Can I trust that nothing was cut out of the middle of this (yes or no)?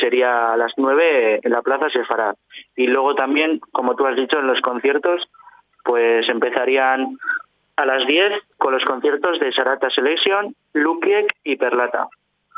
yes